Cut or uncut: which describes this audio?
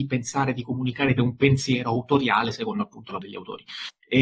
cut